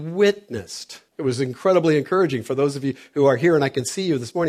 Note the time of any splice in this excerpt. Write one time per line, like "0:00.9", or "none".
0:01.1